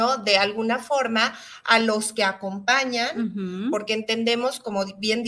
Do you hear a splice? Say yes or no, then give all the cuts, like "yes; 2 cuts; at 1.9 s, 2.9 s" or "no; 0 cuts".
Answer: no; 0 cuts